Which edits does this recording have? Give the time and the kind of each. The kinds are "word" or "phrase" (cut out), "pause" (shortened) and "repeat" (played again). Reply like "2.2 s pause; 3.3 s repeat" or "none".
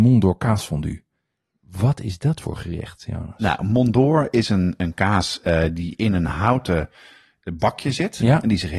none